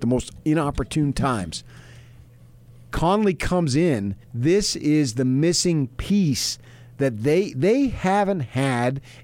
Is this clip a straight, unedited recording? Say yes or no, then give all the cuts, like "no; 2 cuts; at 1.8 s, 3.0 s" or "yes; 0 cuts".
no; 1 cut; at 4.2 s